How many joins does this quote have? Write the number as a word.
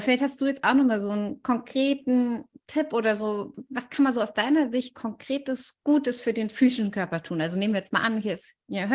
zero